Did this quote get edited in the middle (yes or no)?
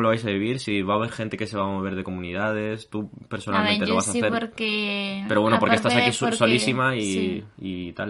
no